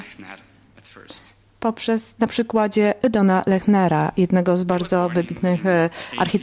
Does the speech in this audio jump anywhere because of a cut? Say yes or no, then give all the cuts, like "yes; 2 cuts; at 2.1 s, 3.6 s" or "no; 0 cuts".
no; 0 cuts